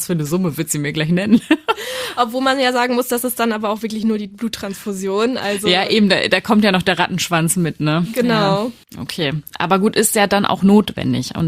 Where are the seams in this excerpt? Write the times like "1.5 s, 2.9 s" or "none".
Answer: none